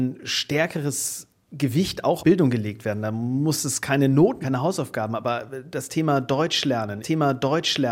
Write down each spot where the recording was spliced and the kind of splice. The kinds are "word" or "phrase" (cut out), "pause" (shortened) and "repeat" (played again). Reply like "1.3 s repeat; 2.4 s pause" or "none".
2.2 s word; 4.4 s word; 7.0 s repeat